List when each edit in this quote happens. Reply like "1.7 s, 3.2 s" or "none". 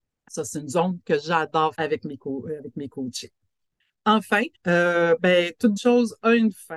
1.7 s, 4.5 s, 5.8 s

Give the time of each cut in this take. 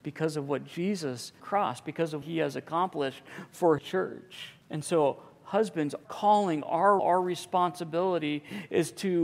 1.4 s, 2.2 s, 3.8 s, 4.6 s, 6.0 s, 7.0 s

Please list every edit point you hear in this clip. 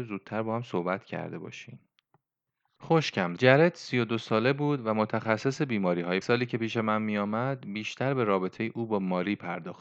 3.4 s, 6.2 s

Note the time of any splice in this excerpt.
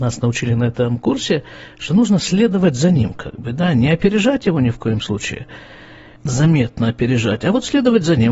none

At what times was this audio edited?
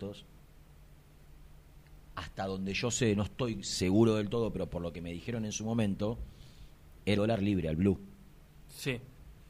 7.2 s

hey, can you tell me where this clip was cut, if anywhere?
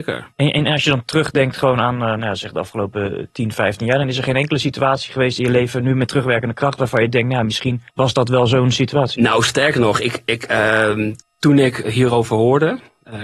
7.9 s

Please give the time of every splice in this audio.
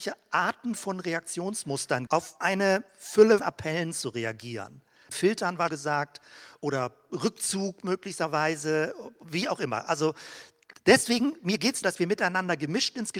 2.1 s, 2.4 s, 3.4 s, 5.1 s, 5.7 s, 11.8 s

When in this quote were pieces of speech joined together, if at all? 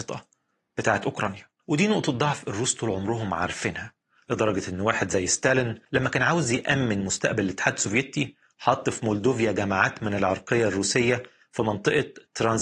1.6 s, 5.9 s

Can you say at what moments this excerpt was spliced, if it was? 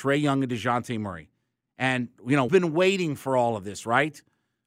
2.5 s

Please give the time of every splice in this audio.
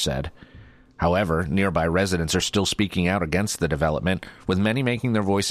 none

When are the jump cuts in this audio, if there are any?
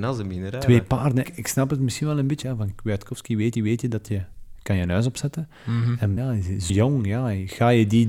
1.2 s, 2.4 s, 3.5 s, 6.2 s, 6.7 s

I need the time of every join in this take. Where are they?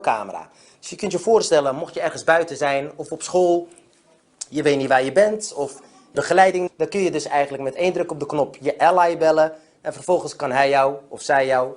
6.1 s, 6.7 s

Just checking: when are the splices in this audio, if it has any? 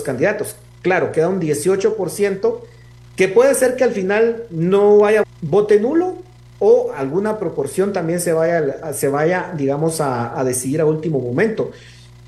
5.2 s

